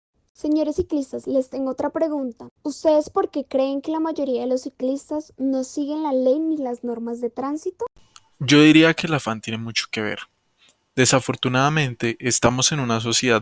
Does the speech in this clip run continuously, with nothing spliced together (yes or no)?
yes